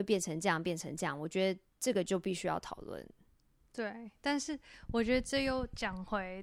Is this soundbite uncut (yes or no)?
no